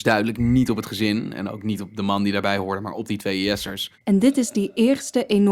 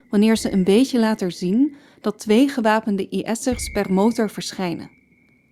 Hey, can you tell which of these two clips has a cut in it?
first; 1 cut; at 4.0 s

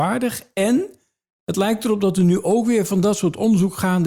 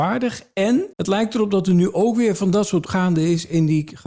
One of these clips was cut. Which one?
second; 2 cuts; at 0.9 s, 2.9 s

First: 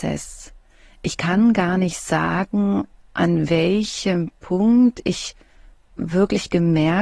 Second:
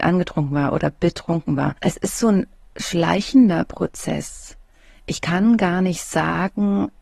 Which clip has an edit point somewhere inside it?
second; 1 cut; at 1.8 s

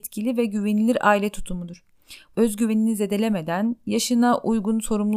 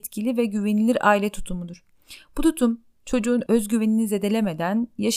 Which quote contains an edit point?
first; 1 cut; at 2.3 s

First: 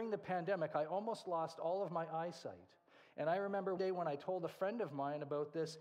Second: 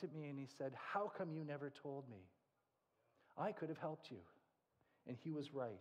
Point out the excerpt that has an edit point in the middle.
first; 1 cut; at 3.8 s

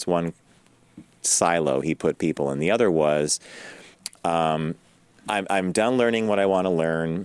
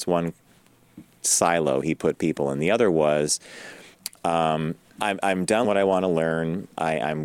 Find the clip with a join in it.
second; 2 cuts; at 4.9 s, 5.6 s

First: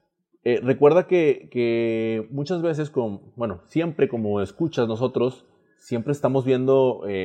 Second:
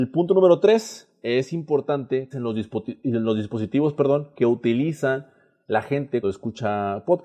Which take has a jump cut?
second; 2 cuts; at 2.3 s, 6.2 s

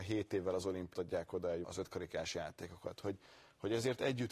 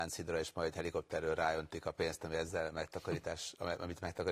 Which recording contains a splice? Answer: first; 2 cuts; at 0.9 s, 1.6 s

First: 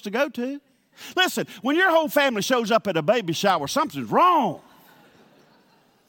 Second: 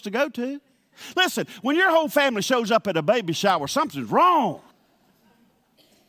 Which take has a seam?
second; 1 cut; at 4.7 s

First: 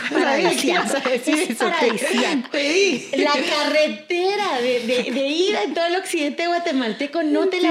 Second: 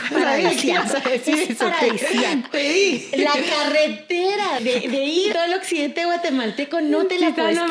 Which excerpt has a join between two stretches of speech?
second; 2 cuts; at 4.6 s, 5.3 s

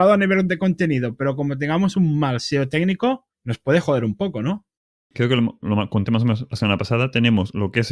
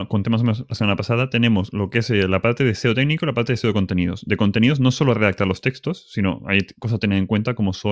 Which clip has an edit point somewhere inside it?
first; 1 cut; at 3.3 s

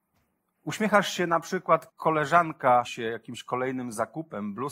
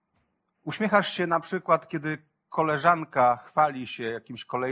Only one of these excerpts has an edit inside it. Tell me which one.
first; 2 cuts; at 1.9 s, 2.8 s

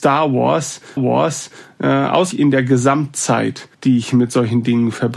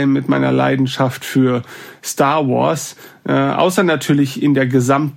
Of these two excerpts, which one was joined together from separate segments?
first; 3 cuts; at 1.0 s, 2.3 s, 3.7 s

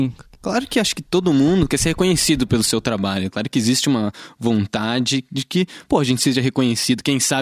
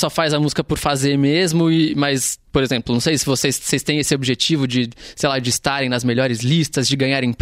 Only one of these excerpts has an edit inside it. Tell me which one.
second; 1 cut; at 2.5 s

